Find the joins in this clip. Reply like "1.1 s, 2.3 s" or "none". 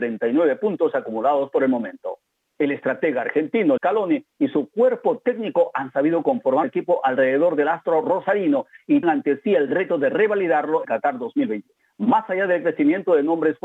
3.8 s, 6.6 s, 9.0 s, 10.8 s

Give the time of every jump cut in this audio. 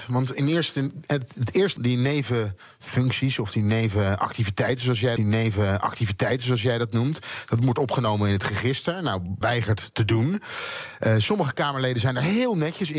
1.8 s, 5.2 s, 9.4 s, 9.9 s

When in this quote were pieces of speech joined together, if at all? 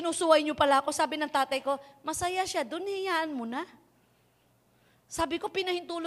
none

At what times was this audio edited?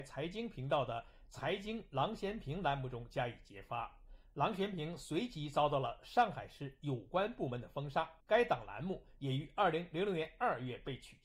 8.2 s

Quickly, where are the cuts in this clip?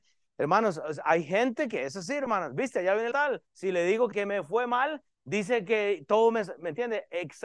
3.1 s, 3.5 s, 4.1 s

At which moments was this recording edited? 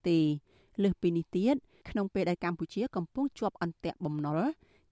none

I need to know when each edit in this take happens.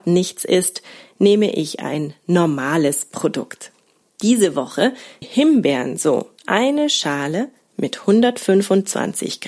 5.2 s, 6.4 s

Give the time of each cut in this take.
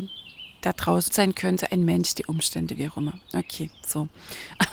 1.1 s, 2.3 s

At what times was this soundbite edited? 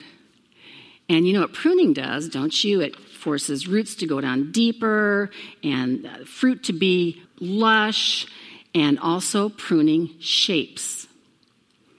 7.3 s

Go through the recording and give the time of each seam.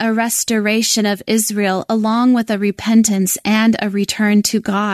none

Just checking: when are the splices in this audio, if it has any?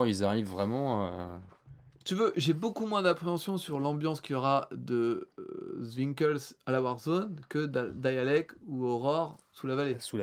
none

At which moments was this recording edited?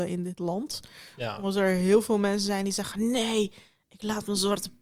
none

